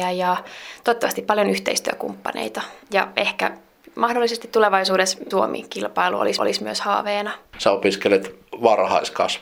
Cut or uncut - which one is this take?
cut